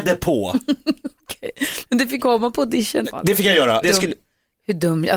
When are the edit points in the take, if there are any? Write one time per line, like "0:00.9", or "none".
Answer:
0:02.2
0:03.0
0:03.8